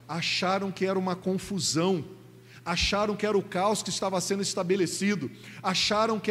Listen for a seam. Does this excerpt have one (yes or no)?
no